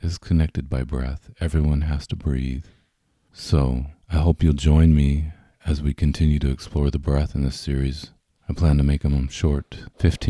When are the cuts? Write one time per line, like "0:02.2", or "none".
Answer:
none